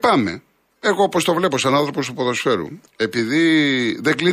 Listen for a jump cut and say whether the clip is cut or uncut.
cut